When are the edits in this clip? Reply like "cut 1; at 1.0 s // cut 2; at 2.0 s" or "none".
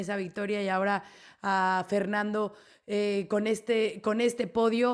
none